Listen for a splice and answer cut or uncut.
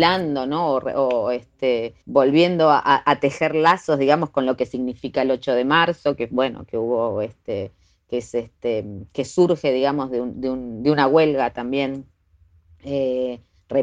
cut